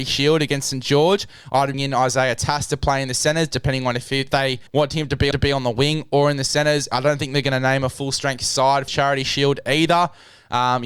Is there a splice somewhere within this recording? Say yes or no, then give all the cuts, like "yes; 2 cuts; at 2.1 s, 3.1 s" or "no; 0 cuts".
yes; 5 cuts; at 1.7 s, 4.3 s, 4.7 s, 5.3 s, 8.9 s